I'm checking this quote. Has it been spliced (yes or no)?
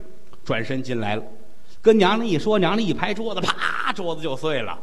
no